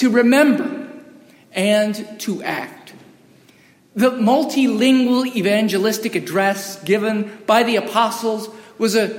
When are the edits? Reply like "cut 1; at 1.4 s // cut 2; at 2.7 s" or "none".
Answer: none